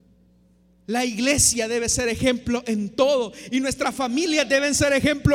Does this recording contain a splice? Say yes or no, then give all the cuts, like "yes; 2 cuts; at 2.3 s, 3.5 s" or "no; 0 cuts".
no; 0 cuts